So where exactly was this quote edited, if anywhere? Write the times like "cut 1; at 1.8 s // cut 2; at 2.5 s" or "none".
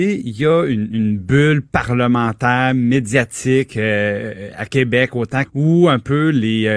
cut 1; at 5.4 s